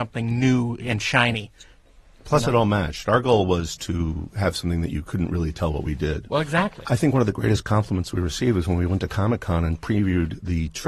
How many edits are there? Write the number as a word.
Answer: one